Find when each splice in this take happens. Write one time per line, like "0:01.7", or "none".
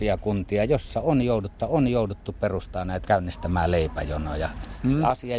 0:01.6
0:03.0